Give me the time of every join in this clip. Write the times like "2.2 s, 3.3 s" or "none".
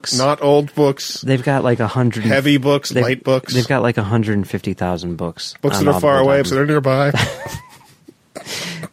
5.6 s, 6.4 s